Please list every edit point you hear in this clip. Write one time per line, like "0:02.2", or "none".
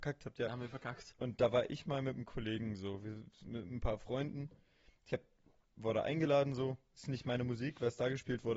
none